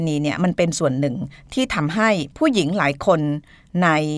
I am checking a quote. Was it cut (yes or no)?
yes